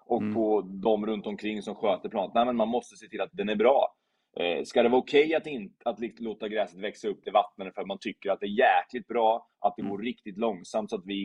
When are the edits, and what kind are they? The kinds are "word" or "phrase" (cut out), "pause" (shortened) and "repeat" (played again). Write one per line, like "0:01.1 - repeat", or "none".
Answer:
0:03.3 - word
0:07.2 - word